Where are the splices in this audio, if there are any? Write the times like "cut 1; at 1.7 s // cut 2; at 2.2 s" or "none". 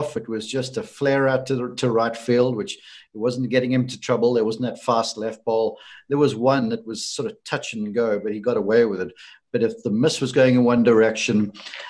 none